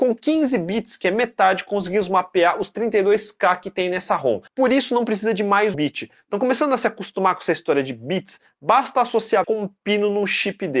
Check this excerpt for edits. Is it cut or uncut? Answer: cut